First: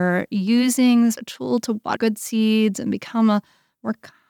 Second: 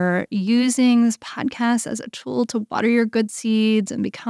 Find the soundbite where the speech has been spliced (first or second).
first